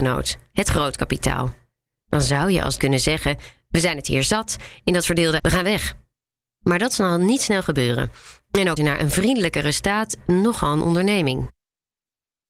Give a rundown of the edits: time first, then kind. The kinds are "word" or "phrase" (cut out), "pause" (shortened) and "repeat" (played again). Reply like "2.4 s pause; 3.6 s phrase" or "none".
2.8 s word; 5.4 s word; 8.8 s word; 10.2 s word